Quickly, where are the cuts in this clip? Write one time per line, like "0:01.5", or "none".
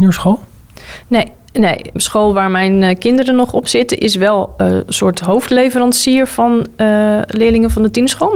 none